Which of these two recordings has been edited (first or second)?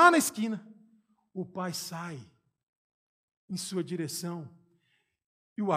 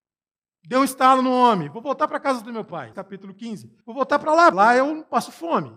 second